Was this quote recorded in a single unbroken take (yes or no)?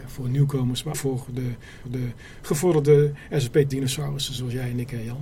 no